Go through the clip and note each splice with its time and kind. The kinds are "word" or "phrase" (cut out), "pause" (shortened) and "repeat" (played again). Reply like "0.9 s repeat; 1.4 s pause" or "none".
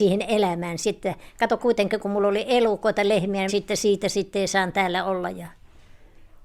1.6 s word; 3.5 s phrase